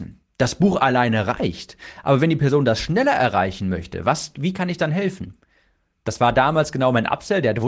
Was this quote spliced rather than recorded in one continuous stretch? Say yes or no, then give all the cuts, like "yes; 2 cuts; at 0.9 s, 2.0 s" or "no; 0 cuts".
no; 0 cuts